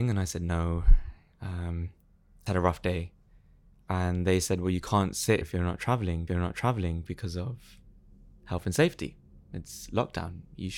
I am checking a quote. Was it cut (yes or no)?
yes